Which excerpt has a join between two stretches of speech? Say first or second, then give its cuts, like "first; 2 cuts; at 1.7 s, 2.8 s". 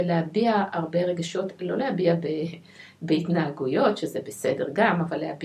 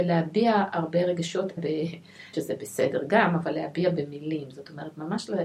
second; 2 cuts; at 1.6 s, 2.3 s